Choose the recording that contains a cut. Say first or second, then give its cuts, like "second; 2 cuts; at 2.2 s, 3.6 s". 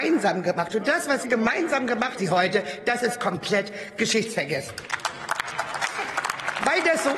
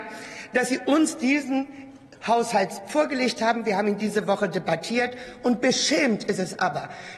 first; 2 cuts; at 1.2 s, 2.2 s